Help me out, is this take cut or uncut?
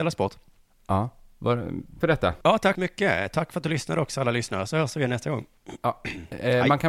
cut